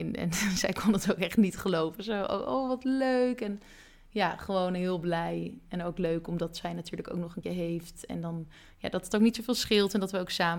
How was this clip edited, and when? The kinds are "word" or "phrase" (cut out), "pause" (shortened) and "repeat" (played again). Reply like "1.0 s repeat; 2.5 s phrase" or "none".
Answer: 7.4 s word